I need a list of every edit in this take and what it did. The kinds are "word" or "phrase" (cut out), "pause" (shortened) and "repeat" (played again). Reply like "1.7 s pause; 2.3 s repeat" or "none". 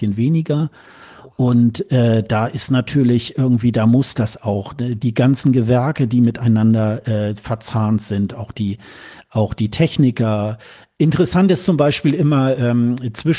none